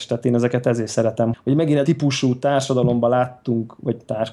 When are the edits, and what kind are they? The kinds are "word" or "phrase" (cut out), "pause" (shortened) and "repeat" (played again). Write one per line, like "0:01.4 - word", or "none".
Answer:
0:01.3 - word
0:01.8 - word